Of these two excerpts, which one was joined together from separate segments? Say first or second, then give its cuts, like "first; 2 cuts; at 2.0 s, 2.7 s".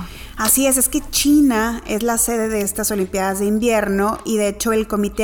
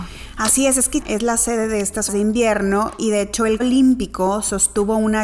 second; 3 cuts; at 1.0 s, 2.1 s, 3.6 s